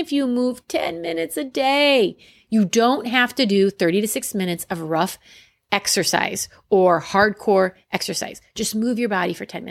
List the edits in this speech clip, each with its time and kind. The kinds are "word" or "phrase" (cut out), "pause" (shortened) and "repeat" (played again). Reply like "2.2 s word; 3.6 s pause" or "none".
none